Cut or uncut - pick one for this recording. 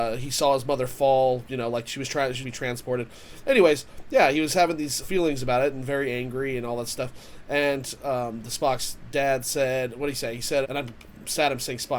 cut